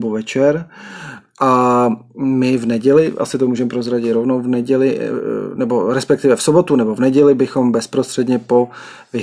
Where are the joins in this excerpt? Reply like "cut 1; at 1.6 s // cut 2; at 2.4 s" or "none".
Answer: none